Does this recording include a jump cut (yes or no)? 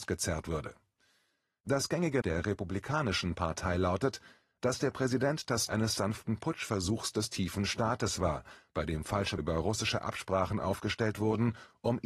yes